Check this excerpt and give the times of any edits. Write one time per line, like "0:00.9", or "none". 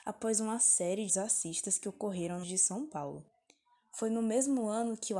0:01.1
0:02.4